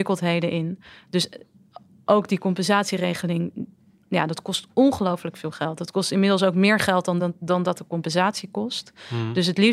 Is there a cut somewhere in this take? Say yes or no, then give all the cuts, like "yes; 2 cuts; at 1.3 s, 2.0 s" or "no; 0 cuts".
no; 0 cuts